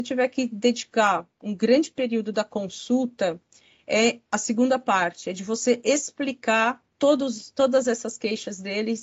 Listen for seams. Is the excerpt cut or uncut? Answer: cut